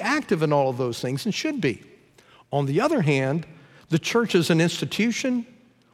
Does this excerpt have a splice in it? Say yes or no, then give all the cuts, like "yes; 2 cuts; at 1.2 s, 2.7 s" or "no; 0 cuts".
no; 0 cuts